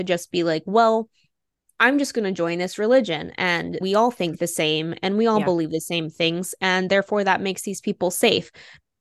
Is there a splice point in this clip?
yes; 1 cut; at 3.8 s

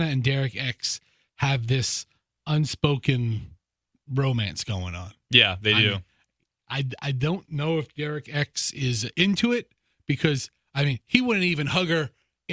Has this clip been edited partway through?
no; 0 cuts

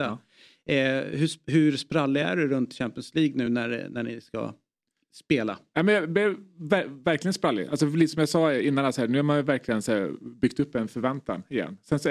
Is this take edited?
no; 0 cuts

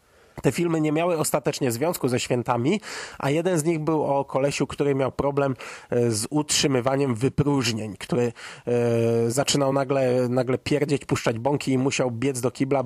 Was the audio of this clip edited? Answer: no; 0 cuts

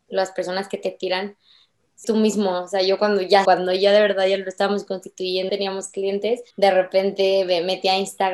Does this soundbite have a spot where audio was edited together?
yes; 4 cuts; at 2.0 s, 3.5 s, 5.5 s, 6.5 s

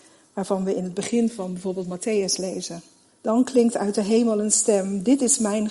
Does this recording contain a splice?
yes; 1 cut; at 3.0 s

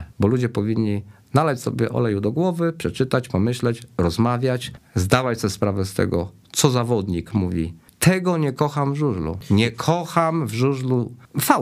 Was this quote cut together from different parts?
no; 0 cuts

